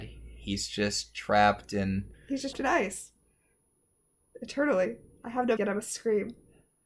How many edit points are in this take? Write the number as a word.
three